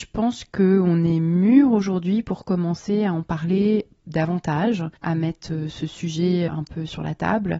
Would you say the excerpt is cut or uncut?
cut